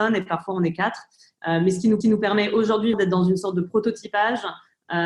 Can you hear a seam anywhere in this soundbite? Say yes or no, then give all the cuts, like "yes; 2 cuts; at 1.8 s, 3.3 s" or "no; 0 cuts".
yes; 2 cuts; at 2.0 s, 2.9 s